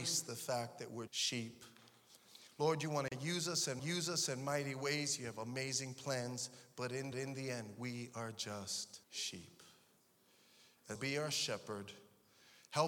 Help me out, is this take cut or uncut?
cut